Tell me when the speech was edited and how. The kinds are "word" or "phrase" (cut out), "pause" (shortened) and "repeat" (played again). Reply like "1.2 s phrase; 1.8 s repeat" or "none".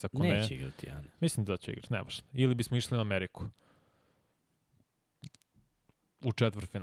none